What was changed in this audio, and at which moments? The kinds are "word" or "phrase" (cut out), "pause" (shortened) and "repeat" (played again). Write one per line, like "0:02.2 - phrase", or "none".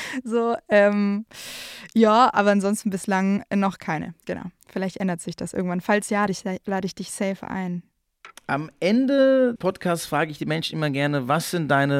0:04.6 - pause
0:06.3 - word
0:08.4 - pause
0:09.6 - word